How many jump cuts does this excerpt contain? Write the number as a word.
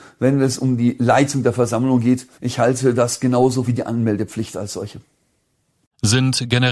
two